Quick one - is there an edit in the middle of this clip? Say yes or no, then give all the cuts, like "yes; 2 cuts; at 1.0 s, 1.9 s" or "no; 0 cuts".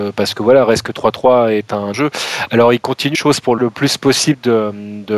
yes; 3 cuts; at 1.9 s, 3.1 s, 3.6 s